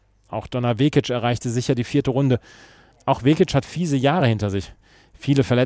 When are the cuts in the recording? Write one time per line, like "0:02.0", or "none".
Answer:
none